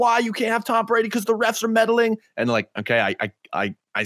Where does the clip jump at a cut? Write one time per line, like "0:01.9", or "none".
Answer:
0:02.7

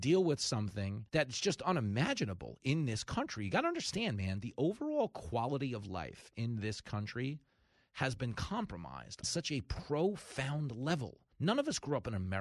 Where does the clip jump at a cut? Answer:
0:01.1
0:09.2
0:11.3

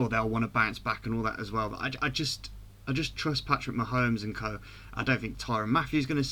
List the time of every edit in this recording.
none

